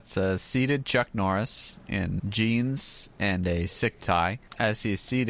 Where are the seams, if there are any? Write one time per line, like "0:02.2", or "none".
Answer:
0:02.2
0:04.0